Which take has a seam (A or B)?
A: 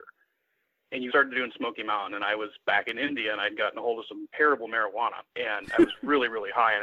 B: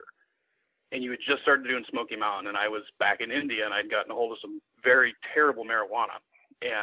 A